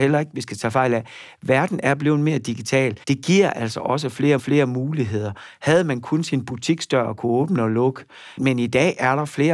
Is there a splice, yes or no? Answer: yes